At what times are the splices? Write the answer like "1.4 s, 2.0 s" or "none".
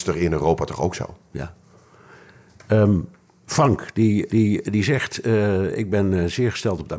1.2 s, 4.3 s